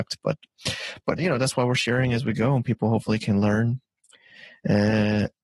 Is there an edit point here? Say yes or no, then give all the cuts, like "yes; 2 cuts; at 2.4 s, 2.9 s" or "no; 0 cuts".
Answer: yes; 1 cut; at 1.2 s